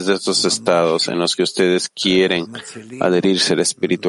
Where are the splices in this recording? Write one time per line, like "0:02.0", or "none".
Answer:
none

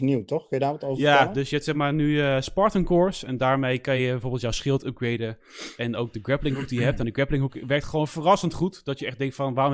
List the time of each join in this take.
none

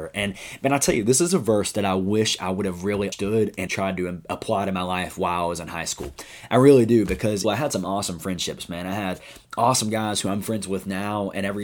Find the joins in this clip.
0:03.1
0:03.7
0:07.4

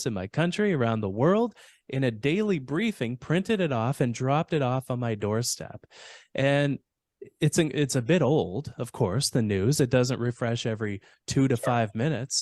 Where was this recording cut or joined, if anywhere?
none

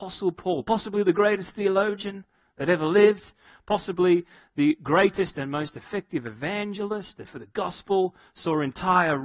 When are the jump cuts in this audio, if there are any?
0:07.2

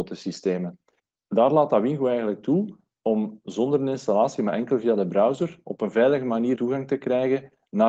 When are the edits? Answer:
0:06.6

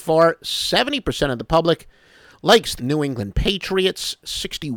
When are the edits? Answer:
0:02.8

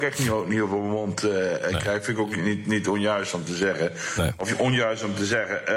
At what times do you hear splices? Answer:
none

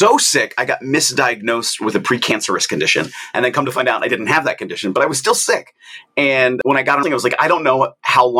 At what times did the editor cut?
0:07.0

